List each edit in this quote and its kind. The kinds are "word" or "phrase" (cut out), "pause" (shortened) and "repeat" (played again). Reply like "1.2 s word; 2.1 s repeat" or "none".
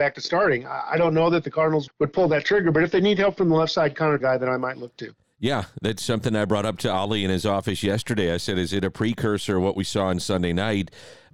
1.9 s word; 4.2 s phrase